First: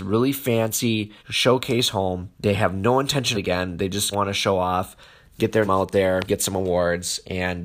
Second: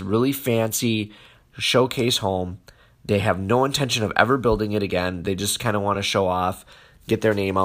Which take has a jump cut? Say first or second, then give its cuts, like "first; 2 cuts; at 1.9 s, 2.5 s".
first; 6 cuts; at 1.2 s, 2.3 s, 3.3 s, 4.1 s, 5.7 s, 6.3 s